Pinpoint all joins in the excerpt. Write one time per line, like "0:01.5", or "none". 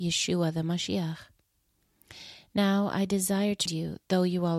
0:03.7